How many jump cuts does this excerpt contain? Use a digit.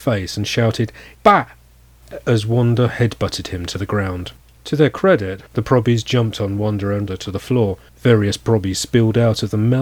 5